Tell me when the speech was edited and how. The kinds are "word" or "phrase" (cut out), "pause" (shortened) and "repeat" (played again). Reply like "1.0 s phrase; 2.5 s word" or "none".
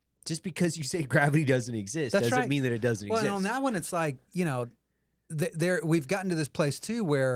none